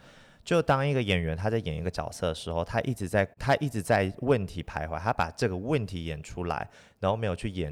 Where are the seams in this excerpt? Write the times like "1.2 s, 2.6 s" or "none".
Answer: 3.3 s